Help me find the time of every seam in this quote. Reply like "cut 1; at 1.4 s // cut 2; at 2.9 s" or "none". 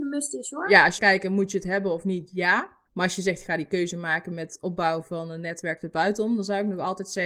cut 1; at 1.0 s // cut 2; at 2.9 s